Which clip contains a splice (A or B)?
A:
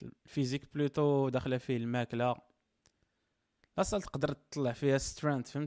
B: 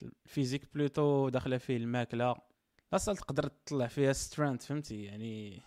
B